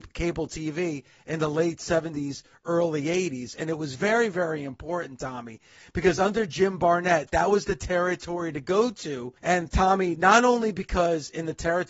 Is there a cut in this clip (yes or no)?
yes